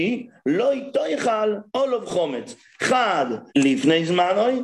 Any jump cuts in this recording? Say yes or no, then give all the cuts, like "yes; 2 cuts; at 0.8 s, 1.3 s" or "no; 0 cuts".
yes; 2 cuts; at 1.7 s, 3.5 s